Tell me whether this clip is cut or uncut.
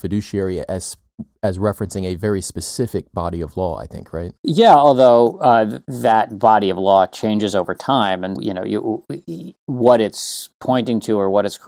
cut